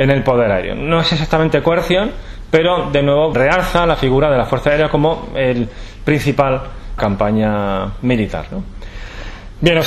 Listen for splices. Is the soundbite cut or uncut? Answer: cut